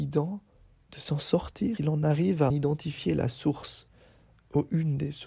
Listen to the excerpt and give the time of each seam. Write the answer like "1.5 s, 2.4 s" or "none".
1.8 s, 2.5 s